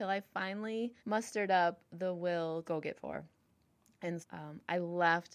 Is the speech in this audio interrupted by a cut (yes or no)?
yes